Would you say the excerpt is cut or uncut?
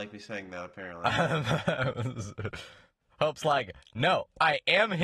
uncut